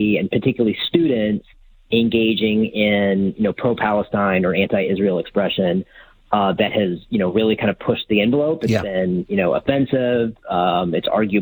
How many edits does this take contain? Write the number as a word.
zero